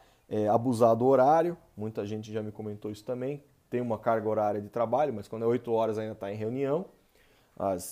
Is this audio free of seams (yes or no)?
yes